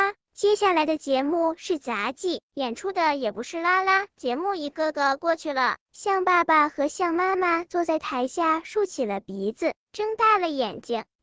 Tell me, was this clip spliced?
yes; 1 cut; at 4.1 s

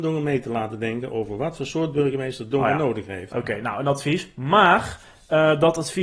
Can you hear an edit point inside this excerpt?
no; 0 cuts

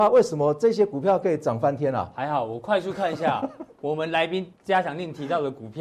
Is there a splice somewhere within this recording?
yes; 1 cut; at 4.5 s

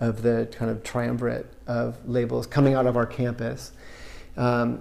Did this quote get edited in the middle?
no; 0 cuts

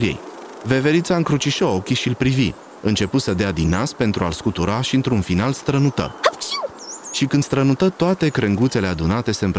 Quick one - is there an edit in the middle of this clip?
no; 0 cuts

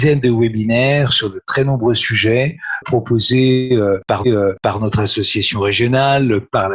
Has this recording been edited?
yes; 2 cuts; at 2.8 s, 4.2 s

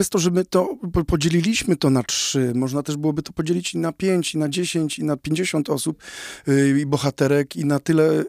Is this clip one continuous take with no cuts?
yes; 0 cuts

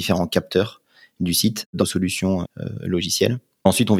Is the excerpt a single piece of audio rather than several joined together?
no; 2 cuts; at 1.8 s, 2.4 s

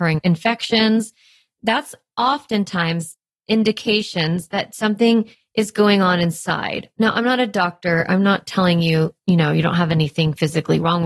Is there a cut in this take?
no; 0 cuts

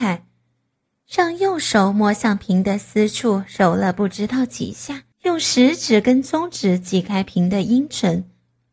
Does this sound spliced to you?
yes; 1 cut; at 5.1 s

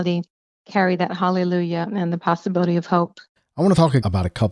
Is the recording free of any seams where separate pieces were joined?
yes; 0 cuts

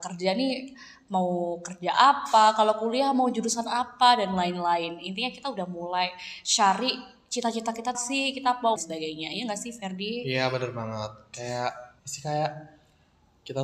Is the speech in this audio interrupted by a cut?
yes; 3 cuts; at 7.9 s, 8.8 s, 12.0 s

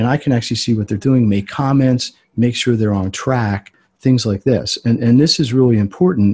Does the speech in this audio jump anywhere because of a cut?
no; 0 cuts

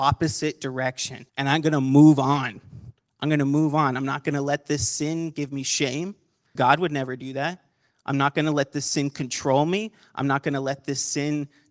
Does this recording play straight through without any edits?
no; 2 cuts; at 1.3 s, 6.6 s

